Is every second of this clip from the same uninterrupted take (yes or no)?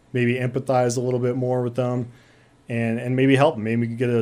yes